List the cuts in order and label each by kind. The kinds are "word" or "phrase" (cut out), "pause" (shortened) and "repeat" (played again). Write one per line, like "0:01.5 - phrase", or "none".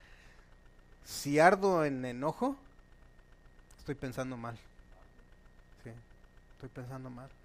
0:05.8 - pause